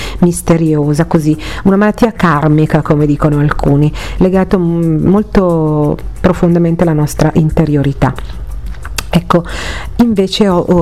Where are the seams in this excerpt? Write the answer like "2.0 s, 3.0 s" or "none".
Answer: 4.5 s